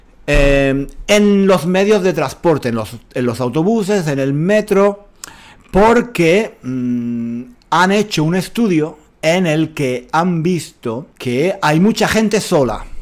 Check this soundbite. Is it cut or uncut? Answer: cut